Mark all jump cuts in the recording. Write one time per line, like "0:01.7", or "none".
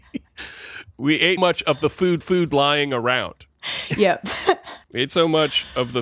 0:01.4
0:02.2
0:04.8